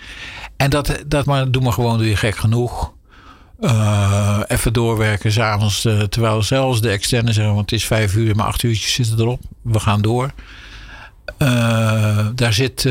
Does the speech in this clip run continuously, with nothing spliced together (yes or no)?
no